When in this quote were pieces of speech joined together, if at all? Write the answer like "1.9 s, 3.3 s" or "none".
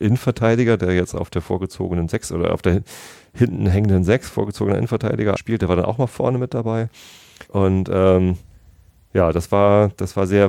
5.4 s, 7.5 s